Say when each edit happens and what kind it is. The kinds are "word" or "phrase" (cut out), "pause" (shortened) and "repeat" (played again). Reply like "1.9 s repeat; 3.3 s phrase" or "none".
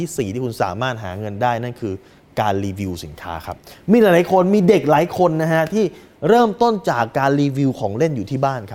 none